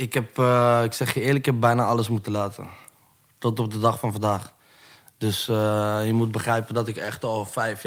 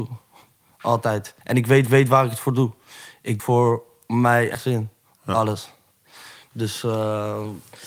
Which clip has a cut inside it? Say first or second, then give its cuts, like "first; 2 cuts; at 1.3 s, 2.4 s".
second; 4 cuts; at 1.4 s, 1.9 s, 3.4 s, 4.5 s